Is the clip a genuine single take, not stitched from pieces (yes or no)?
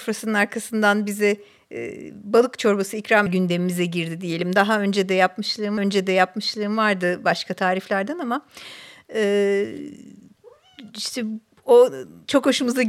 no